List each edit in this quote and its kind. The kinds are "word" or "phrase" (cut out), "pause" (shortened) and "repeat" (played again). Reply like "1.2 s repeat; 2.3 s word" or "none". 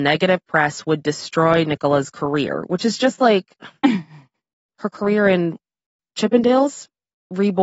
none